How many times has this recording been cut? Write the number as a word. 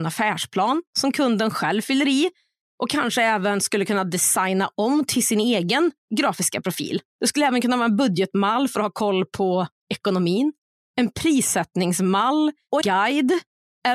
two